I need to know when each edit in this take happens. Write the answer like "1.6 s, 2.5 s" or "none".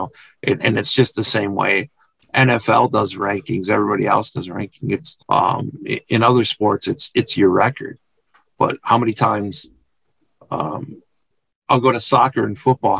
5.2 s